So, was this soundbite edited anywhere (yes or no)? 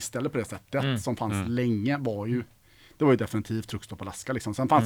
no